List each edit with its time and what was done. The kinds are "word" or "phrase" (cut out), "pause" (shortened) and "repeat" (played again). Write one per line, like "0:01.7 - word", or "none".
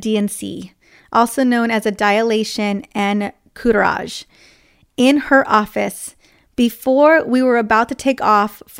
none